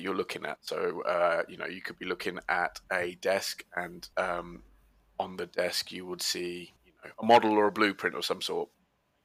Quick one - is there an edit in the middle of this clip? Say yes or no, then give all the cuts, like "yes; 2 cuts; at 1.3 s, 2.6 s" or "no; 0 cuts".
yes; 3 cuts; at 4.1 s, 6.8 s, 7.1 s